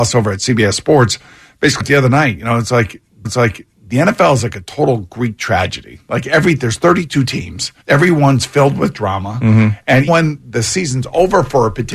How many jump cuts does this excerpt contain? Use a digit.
4